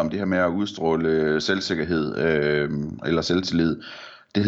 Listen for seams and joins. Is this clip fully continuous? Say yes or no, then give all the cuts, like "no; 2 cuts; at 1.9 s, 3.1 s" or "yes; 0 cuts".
yes; 0 cuts